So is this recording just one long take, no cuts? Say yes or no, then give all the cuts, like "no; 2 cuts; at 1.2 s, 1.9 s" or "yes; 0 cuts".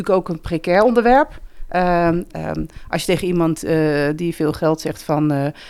yes; 0 cuts